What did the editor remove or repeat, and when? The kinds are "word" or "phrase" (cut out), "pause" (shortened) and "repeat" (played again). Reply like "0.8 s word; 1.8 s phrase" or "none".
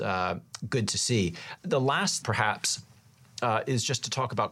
2.2 s word